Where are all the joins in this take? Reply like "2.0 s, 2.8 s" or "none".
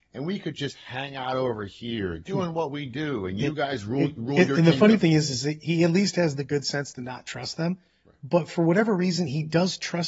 none